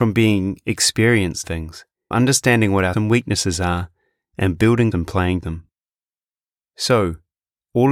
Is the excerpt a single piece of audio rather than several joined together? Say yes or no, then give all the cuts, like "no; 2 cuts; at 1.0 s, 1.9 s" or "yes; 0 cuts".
no; 5 cuts; at 1.4 s, 2.1 s, 2.9 s, 4.9 s, 5.4 s